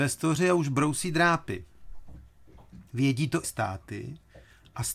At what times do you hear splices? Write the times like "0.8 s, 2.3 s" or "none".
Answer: 2.9 s, 3.4 s